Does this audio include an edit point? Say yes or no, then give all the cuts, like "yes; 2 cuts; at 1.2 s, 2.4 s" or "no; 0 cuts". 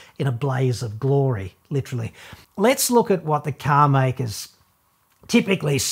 yes; 1 cut; at 2.4 s